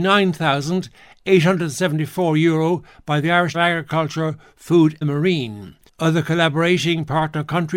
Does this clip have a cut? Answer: yes; 3 cuts; at 3.5 s, 5.0 s, 5.9 s

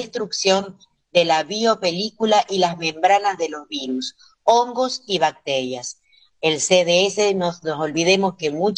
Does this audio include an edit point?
no; 0 cuts

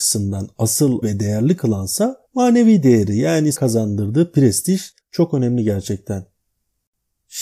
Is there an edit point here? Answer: yes; 4 cuts; at 1.0 s, 2.3 s, 3.5 s, 5.0 s

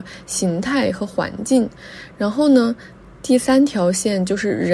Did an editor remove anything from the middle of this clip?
no; 0 cuts

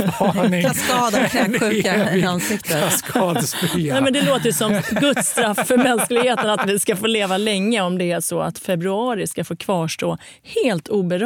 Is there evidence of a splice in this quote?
no; 0 cuts

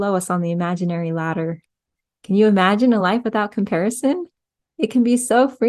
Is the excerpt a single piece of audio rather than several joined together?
yes; 0 cuts

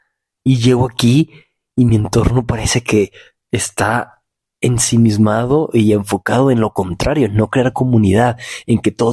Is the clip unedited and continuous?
yes; 0 cuts

